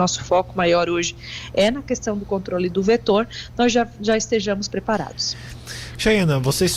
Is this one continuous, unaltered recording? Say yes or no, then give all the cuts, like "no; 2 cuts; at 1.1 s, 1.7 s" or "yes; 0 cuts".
yes; 0 cuts